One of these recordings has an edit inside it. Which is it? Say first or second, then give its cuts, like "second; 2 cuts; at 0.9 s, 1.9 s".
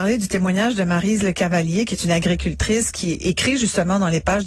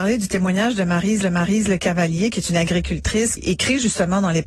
second; 2 cuts; at 1.2 s, 3.4 s